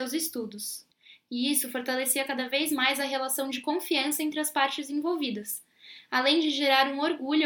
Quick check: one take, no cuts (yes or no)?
yes